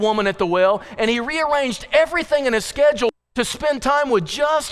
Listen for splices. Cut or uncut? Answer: uncut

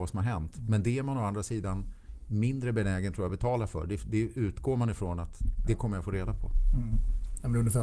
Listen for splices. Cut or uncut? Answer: uncut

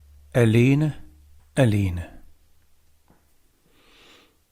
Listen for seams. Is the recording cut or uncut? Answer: cut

